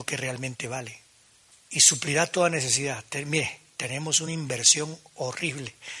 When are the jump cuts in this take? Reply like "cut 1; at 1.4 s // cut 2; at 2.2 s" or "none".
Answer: none

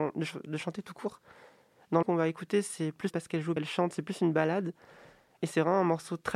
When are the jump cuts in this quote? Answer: cut 1; at 2.0 s // cut 2; at 3.1 s // cut 3; at 3.6 s

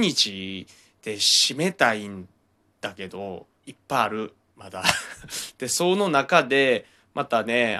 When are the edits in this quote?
cut 1; at 2.4 s // cut 2; at 3.5 s

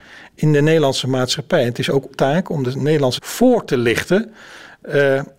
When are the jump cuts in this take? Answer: cut 1; at 2.1 s // cut 2; at 3.2 s

